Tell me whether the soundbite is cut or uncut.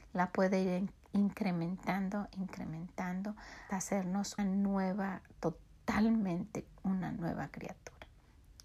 cut